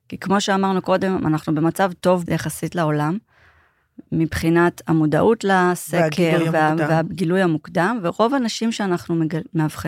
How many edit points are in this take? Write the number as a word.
one